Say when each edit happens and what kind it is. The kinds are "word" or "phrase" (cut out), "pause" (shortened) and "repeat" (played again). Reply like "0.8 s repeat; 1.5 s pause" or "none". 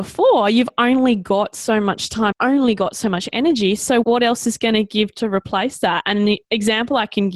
2.3 s phrase; 4.0 s word